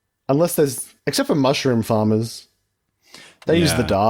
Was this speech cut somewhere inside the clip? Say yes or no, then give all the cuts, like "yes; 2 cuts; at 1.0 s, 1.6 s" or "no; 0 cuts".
yes; 1 cut; at 1.0 s